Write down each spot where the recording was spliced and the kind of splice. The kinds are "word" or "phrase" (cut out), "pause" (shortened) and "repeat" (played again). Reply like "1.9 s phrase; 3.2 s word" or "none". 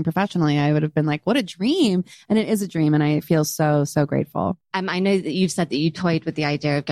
4.6 s pause